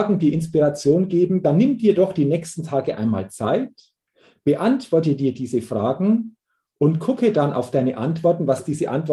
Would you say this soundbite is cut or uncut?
uncut